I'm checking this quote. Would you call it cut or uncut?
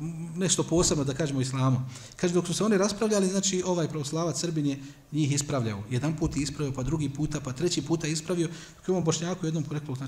uncut